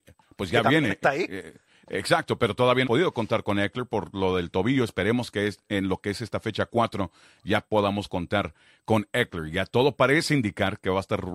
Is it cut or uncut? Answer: cut